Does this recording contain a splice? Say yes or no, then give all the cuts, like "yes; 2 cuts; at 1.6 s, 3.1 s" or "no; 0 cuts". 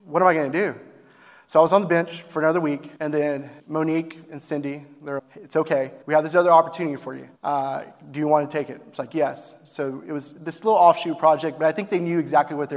yes; 5 cuts; at 3.0 s, 3.6 s, 5.2 s, 6.0 s, 7.4 s